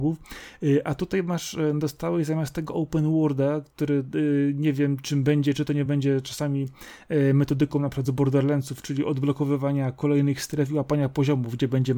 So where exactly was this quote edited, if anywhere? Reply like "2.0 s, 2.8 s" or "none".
none